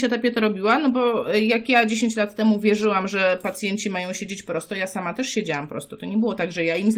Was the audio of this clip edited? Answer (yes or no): no